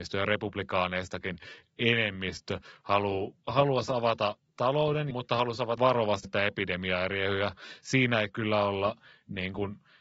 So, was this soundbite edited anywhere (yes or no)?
yes